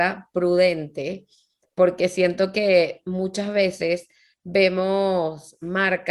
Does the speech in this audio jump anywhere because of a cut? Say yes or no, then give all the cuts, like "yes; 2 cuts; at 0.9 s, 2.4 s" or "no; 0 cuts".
no; 0 cuts